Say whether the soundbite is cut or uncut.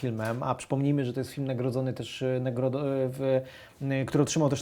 uncut